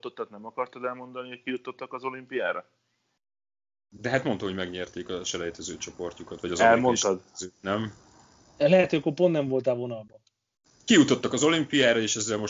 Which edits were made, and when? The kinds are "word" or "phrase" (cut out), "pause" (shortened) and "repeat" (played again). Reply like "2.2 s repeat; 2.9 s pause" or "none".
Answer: none